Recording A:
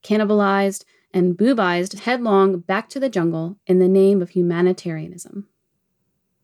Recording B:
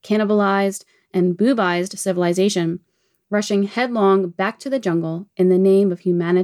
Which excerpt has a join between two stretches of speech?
A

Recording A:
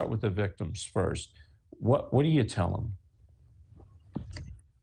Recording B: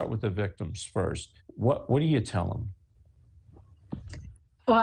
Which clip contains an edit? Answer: B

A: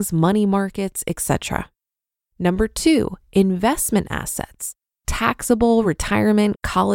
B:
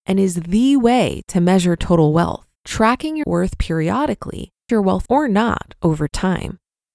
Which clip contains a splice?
B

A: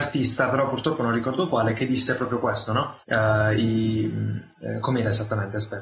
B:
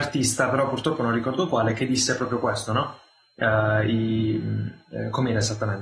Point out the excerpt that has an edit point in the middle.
A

